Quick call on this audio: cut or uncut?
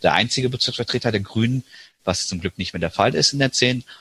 uncut